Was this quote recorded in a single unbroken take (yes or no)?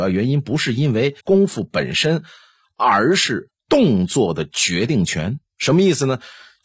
no